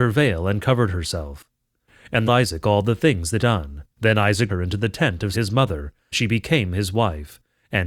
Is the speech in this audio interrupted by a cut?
yes; 6 cuts; at 2.3 s, 3.4 s, 3.9 s, 4.5 s, 5.3 s, 6.1 s

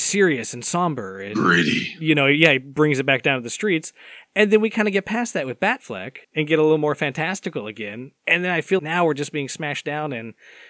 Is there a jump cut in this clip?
yes; 3 cuts; at 6.2 s, 8.2 s, 8.8 s

